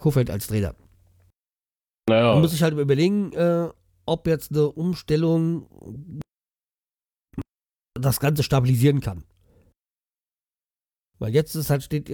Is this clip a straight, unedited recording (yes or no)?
yes